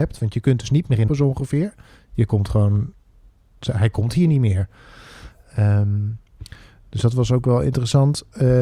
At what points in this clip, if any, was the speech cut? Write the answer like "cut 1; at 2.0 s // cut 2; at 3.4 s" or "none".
cut 1; at 1.1 s